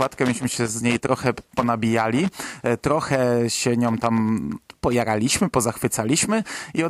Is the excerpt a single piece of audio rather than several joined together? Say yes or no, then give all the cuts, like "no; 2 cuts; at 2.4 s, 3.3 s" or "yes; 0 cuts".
yes; 0 cuts